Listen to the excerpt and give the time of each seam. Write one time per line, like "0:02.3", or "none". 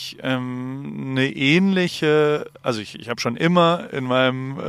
none